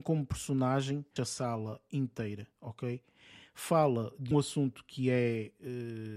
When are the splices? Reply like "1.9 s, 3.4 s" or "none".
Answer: 1.2 s, 4.3 s